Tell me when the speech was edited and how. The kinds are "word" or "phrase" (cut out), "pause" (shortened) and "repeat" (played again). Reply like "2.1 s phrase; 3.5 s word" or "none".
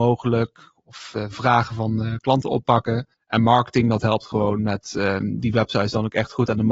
3.1 s pause

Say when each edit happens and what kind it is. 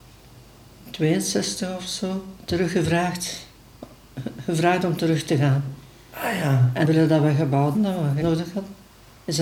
2.4 s pause; 6.8 s word; 7.7 s word; 8.2 s word

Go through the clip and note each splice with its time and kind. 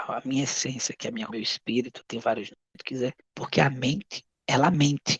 1.3 s word; 2.0 s pause; 3.2 s pause

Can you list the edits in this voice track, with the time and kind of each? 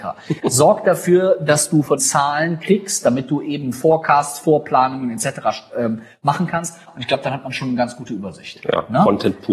2.0 s phrase

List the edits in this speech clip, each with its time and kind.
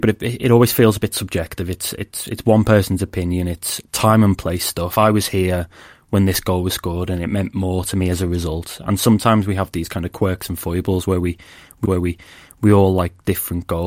11.8 s repeat

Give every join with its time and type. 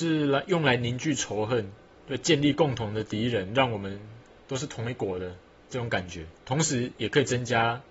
1.9 s pause

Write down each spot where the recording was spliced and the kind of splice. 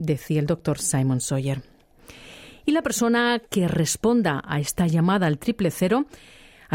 none

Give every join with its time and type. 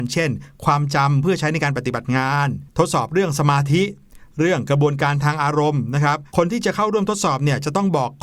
6.3 s pause

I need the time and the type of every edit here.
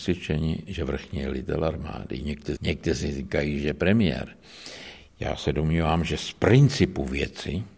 2.6 s phrase

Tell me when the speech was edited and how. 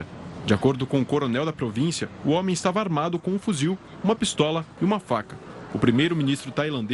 none

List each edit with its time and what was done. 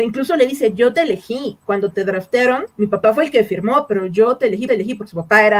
2.7 s pause; 4.7 s repeat

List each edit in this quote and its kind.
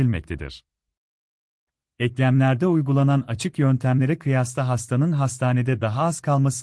none

